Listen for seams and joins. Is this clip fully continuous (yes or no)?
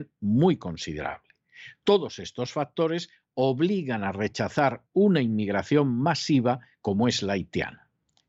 yes